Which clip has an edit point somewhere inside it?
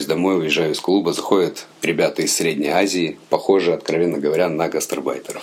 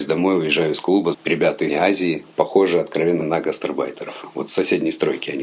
second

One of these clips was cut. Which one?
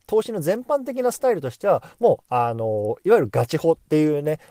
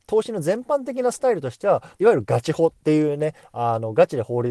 second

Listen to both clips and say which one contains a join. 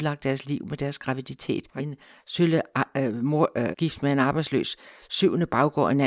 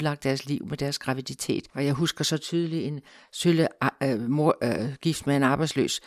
first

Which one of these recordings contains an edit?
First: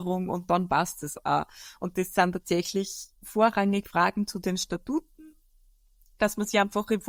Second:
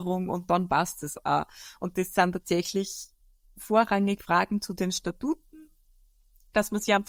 first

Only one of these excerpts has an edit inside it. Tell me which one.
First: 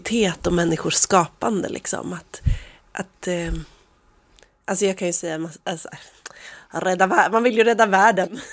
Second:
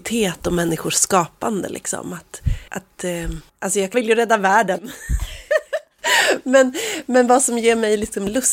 second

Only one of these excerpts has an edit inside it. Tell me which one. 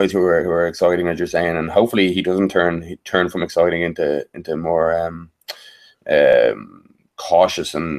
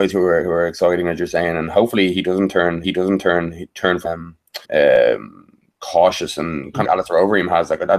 second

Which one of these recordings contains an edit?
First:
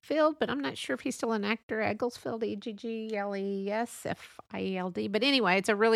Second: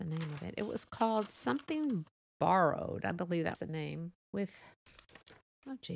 second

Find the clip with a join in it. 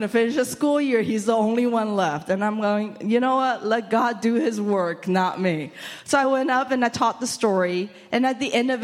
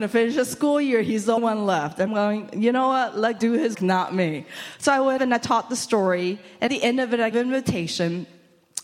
second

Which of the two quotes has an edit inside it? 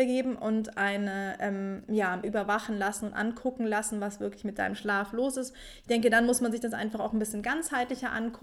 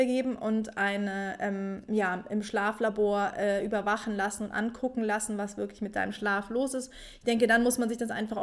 first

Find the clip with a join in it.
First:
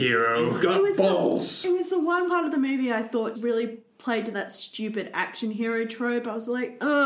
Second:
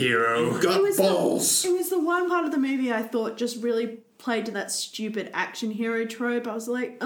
first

